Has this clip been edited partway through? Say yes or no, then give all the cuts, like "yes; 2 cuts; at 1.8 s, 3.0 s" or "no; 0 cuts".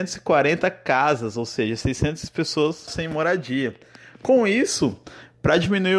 yes; 1 cut; at 2.9 s